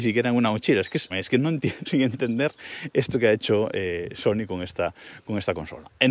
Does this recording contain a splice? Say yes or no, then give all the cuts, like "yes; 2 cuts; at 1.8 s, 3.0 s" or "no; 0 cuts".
yes; 2 cuts; at 1.1 s, 1.9 s